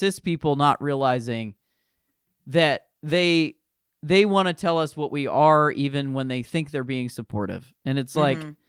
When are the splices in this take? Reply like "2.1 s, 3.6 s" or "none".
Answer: 3.0 s